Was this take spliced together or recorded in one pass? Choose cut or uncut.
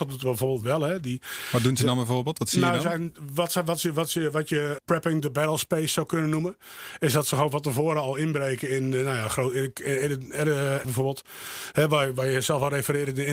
cut